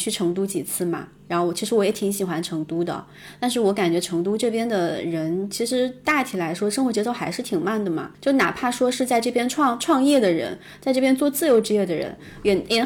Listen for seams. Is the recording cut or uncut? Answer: cut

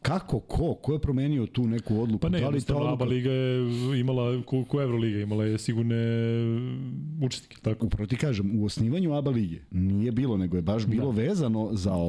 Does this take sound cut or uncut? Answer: cut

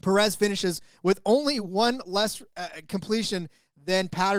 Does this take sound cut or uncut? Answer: uncut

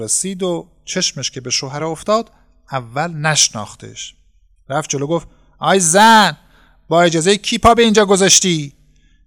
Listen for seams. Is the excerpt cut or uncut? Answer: uncut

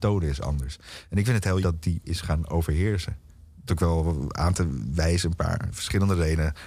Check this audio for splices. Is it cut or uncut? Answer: cut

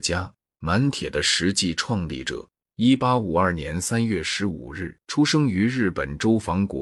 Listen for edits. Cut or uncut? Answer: cut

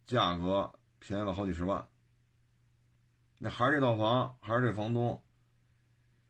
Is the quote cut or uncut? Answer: uncut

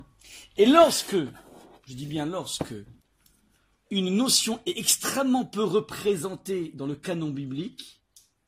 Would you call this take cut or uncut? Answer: uncut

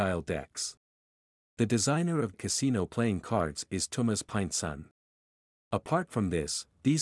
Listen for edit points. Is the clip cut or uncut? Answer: cut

